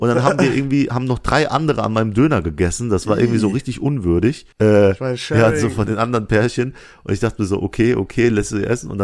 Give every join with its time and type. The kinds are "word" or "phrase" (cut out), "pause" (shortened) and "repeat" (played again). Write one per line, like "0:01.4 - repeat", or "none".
0:04.5 - pause